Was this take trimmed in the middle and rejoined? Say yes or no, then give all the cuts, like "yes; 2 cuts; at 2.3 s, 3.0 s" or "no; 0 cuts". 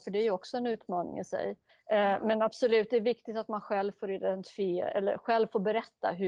yes; 1 cut; at 1.7 s